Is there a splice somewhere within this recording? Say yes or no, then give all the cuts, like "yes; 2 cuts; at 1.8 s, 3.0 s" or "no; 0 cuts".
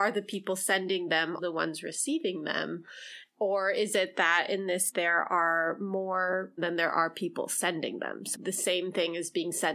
yes; 4 cuts; at 1.4 s, 4.9 s, 6.6 s, 8.3 s